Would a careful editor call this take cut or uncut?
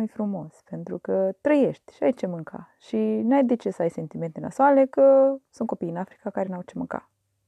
uncut